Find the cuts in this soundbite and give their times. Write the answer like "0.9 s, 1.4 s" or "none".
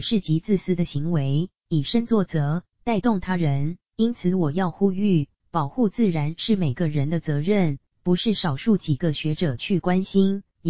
1.6 s, 3.9 s